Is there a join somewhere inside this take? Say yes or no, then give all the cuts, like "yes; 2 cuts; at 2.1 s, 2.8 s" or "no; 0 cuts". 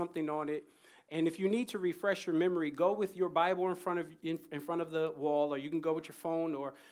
no; 0 cuts